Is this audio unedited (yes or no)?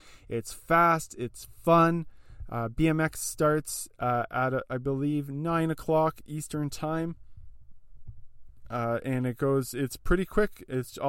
yes